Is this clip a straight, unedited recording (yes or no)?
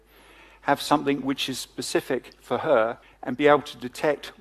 no